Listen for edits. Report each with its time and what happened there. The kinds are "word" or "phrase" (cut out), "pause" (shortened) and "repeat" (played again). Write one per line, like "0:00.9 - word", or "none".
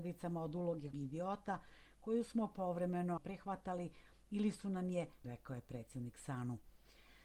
0:00.9 - word
0:03.2 - word
0:05.2 - word